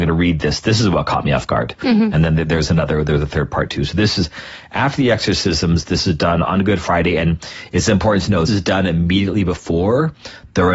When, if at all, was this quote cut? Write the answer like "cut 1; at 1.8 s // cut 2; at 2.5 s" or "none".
cut 1; at 8.5 s

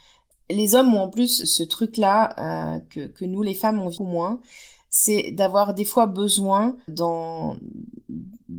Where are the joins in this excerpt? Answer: cut 1; at 1.4 s // cut 2; at 4.0 s // cut 3; at 6.9 s

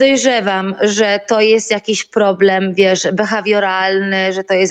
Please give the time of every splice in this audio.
none

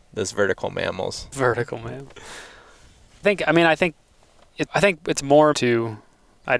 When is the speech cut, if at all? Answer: cut 1; at 1.3 s // cut 2; at 3.2 s // cut 3; at 4.7 s // cut 4; at 5.5 s

